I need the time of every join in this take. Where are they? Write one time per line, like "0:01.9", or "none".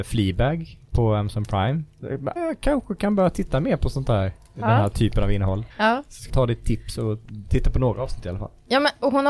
0:02.4
0:05.7
0:06.3

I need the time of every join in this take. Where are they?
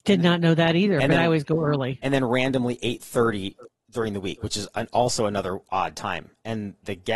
none

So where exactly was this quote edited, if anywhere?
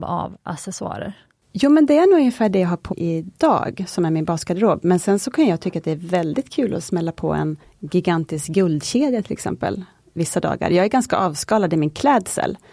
0:02.9
0:07.6
0:10.2

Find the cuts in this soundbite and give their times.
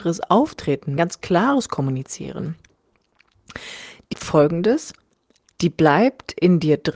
0:01.0
0:04.1

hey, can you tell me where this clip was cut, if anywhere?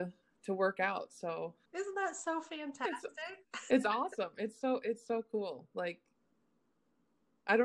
0:01.7
0:03.4

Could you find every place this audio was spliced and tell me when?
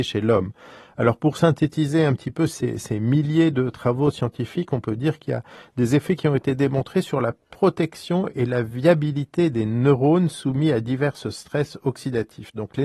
none

